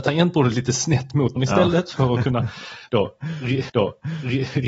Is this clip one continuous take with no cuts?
no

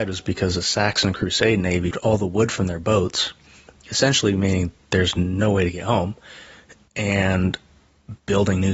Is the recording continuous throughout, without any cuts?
no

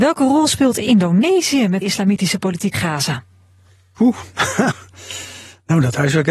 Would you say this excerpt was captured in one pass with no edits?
no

